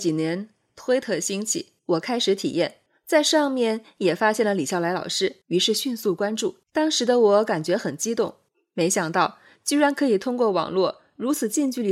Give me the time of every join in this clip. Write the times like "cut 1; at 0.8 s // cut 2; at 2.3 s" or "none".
cut 1; at 1.8 s // cut 2; at 2.9 s // cut 3; at 5.4 s // cut 4; at 6.6 s // cut 5; at 8.5 s